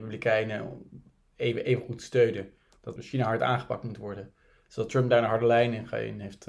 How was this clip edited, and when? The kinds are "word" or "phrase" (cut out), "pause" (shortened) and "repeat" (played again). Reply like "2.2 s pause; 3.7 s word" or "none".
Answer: 3.0 s word